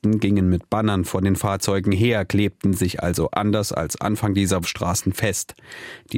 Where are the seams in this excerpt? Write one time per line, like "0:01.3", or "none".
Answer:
0:04.6